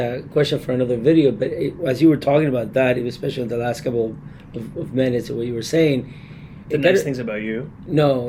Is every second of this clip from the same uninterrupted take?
yes; 0 cuts

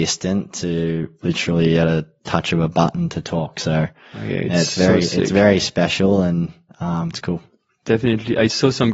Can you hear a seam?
no; 0 cuts

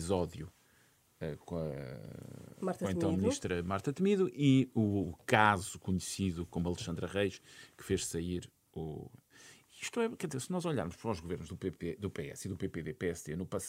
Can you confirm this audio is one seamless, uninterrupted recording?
yes; 0 cuts

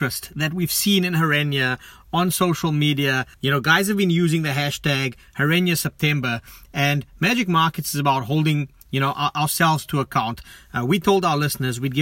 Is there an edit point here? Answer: yes; 1 cut; at 3.3 s

